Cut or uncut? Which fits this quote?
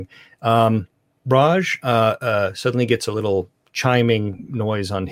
uncut